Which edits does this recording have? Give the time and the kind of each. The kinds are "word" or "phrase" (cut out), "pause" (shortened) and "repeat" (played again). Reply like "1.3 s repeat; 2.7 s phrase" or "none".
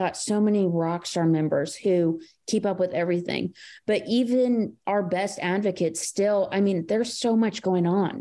none